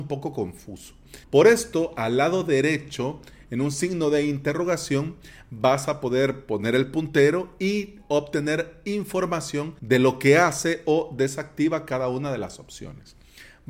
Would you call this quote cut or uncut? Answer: cut